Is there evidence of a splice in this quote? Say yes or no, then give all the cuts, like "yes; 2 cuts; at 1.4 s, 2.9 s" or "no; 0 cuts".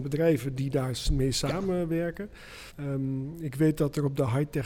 yes; 1 cut; at 2.7 s